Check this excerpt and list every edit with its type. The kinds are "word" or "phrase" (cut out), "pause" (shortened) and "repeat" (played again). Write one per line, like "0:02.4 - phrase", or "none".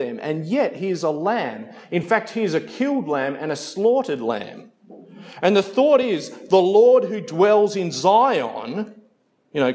none

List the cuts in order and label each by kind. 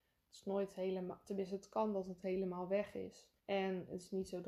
0:03.4 - pause

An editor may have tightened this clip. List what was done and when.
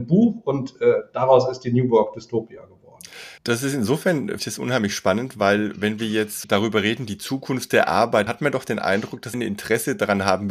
0:03.4 - pause
0:04.4 - word
0:06.4 - word
0:08.3 - word
0:09.3 - word

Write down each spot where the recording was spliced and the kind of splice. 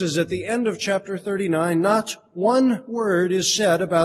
none

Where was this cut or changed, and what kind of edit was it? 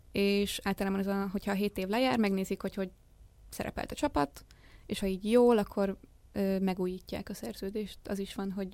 0:05.0 - word

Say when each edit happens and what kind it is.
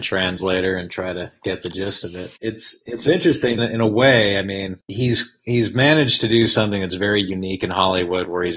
0:03.6 - phrase

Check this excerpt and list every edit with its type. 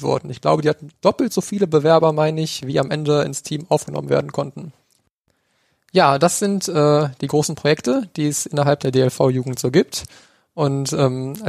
0:01.0 - pause

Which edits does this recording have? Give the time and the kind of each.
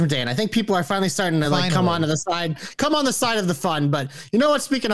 none

